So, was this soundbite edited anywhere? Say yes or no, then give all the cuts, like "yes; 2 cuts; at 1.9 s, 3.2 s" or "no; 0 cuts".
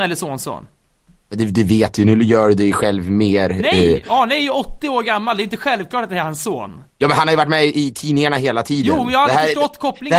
yes; 1 cut; at 6.9 s